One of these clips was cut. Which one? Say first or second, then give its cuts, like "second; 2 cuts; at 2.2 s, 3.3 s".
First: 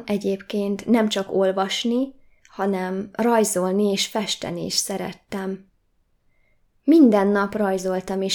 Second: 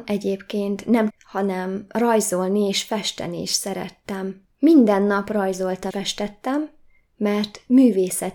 second; 3 cuts; at 1.1 s, 4.5 s, 5.9 s